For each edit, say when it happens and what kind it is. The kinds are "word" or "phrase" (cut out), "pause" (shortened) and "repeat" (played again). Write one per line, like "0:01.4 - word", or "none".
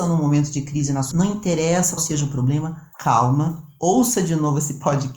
0:01.1 - word
0:02.0 - word
0:02.9 - pause